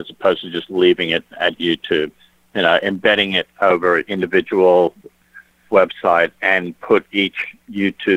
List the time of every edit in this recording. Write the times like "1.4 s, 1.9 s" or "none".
4.0 s